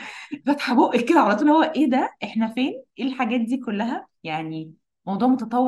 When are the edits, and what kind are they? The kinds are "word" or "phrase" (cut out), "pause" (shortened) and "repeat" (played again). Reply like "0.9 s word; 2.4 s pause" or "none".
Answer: 4.2 s pause